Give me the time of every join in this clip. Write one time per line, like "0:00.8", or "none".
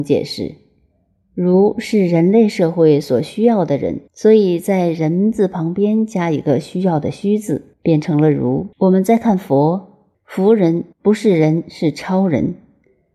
0:04.1
0:07.7
0:08.7
0:10.1
0:10.9

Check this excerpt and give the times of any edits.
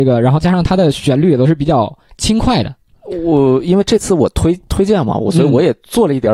none

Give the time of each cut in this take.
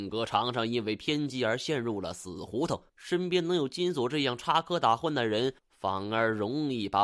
0:02.9
0:05.6

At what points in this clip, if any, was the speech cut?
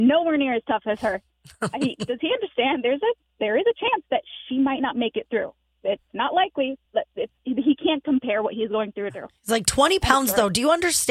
0:06.9
0:09.1

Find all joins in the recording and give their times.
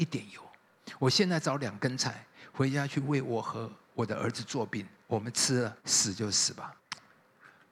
0:05.8
0:06.8

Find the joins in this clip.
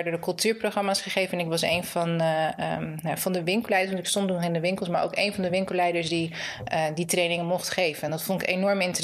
none

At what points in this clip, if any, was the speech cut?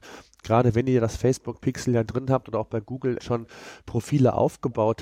0:03.2

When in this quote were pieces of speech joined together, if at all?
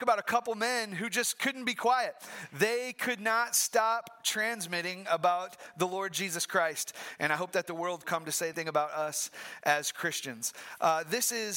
0:08.0
0:08.5

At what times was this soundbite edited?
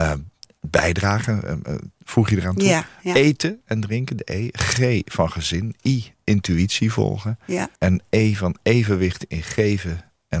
0:07.7

